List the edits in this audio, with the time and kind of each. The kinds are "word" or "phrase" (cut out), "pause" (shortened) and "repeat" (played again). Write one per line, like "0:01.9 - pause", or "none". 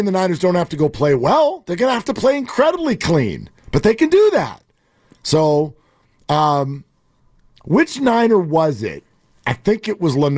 0:03.6 - pause